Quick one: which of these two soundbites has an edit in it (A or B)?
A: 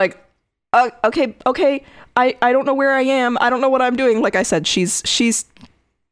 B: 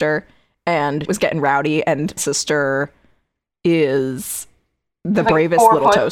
B